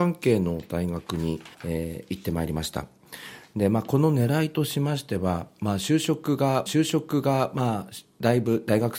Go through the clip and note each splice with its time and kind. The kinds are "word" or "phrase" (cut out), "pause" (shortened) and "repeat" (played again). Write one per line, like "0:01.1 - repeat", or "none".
0:01.5 - pause
0:06.7 - repeat